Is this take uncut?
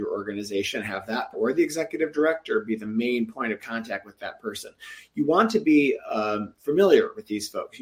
no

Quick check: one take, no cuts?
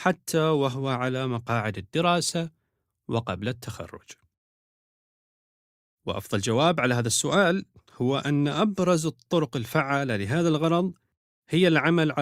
yes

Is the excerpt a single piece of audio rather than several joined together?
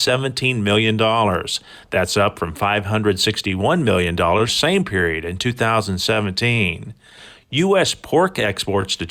no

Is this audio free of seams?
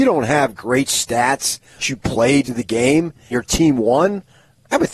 no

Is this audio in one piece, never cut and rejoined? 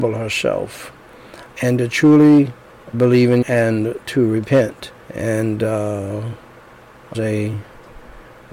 no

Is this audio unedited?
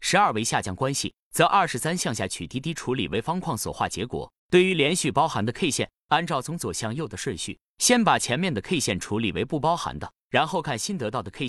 no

